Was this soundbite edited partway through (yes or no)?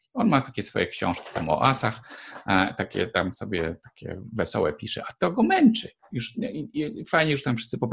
no